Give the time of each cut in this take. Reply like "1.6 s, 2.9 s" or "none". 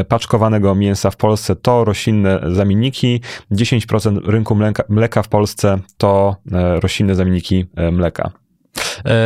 none

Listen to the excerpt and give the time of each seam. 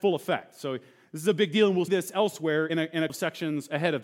1.9 s, 2.7 s, 3.1 s

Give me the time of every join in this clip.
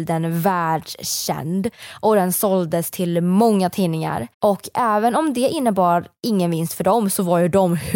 4.3 s

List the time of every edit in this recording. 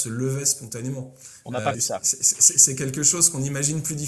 1.7 s

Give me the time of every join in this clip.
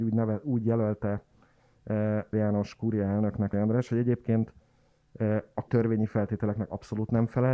2.3 s, 3.5 s, 5.7 s

